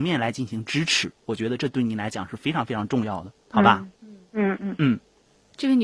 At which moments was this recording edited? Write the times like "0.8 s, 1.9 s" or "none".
3.4 s, 3.9 s